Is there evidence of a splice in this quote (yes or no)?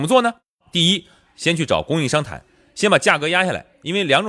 no